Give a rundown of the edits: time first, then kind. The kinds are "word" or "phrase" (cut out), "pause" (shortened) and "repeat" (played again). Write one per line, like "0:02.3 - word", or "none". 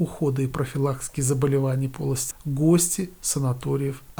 0:02.3 - word